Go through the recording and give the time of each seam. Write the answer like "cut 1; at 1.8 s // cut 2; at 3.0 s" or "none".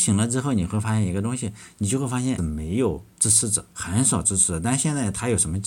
cut 1; at 2.4 s // cut 2; at 3.1 s // cut 3; at 3.7 s